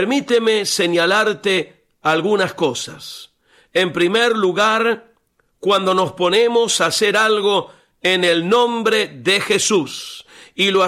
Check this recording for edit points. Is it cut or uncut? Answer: uncut